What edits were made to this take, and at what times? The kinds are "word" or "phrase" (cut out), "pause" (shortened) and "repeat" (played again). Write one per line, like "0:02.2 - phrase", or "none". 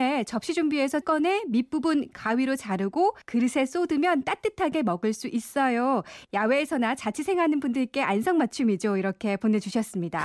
0:01.0 - word
0:03.2 - pause